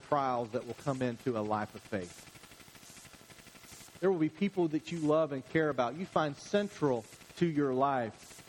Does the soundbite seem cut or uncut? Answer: uncut